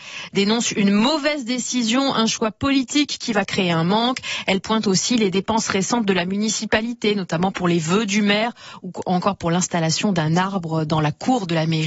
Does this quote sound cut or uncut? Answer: uncut